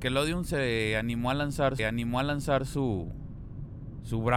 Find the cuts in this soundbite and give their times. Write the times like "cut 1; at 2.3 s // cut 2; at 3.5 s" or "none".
cut 1; at 1.8 s